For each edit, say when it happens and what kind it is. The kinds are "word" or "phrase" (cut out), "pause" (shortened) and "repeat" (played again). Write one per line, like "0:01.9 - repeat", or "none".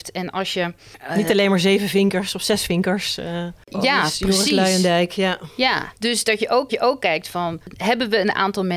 0:06.0 - pause
0:06.7 - repeat